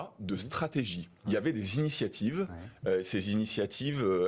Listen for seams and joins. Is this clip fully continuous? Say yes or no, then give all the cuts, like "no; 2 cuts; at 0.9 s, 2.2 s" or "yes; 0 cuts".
yes; 0 cuts